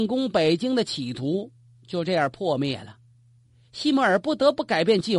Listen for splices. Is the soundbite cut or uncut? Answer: uncut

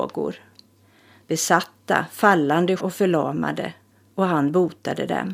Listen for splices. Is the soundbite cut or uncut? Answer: cut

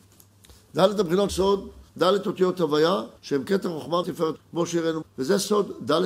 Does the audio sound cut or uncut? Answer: cut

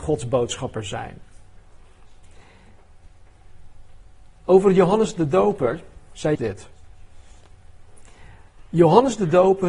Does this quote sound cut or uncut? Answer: cut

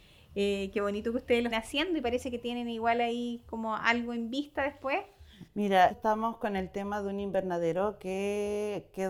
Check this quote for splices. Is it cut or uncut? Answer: cut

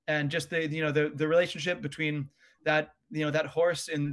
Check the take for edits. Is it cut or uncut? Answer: uncut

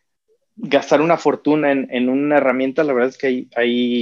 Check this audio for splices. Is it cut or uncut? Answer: uncut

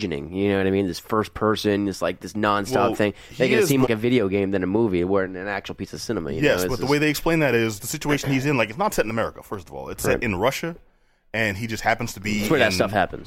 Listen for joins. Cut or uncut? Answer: cut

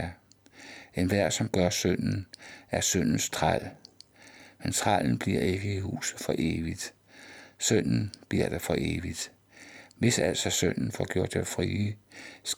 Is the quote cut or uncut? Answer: uncut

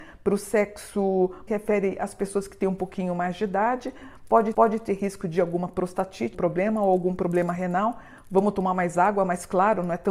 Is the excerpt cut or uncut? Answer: cut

